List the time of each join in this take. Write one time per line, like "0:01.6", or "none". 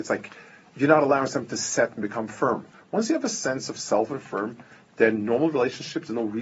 none

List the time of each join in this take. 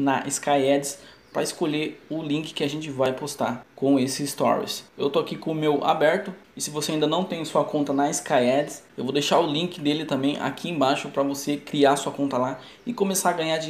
0:04.9

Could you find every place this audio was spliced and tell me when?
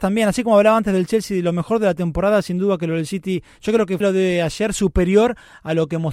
0:04.0

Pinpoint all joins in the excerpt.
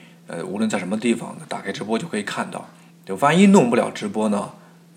0:02.9

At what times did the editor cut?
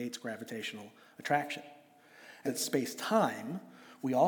0:02.4

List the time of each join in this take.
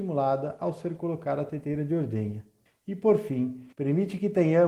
0:02.7
0:03.7

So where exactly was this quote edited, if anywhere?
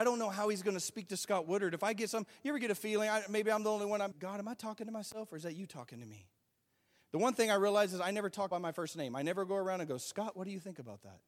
0:04.1
0:08.5

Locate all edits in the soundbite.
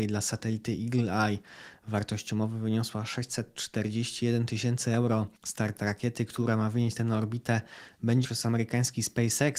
0:05.4
0:07.0
0:08.2

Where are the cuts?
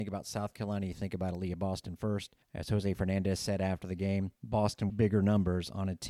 0:02.4
0:04.9

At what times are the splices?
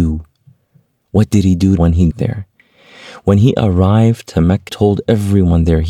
0:01.8
0:02.1
0:04.7

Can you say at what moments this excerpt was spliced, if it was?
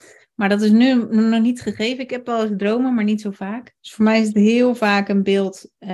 0:03.8

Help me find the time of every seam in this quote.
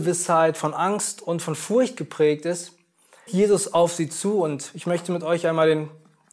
0:03.3

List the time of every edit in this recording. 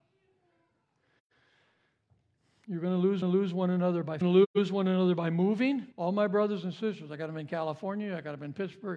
0:03.2
0:04.2
0:05.9

